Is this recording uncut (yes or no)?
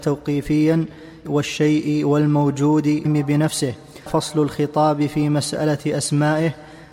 no